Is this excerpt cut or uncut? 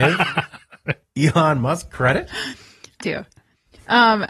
cut